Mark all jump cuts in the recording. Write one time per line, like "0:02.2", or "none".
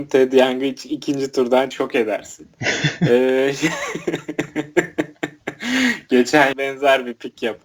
0:01.7
0:06.5